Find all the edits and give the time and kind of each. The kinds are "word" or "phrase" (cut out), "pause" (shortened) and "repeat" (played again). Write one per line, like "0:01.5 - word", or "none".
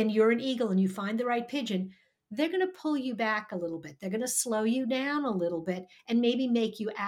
none